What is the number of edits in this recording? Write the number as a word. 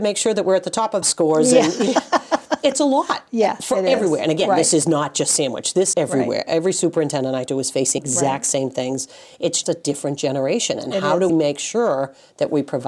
six